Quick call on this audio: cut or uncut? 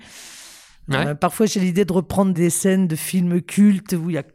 uncut